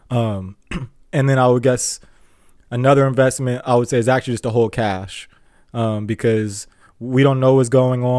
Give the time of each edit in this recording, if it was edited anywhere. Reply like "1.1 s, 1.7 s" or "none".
none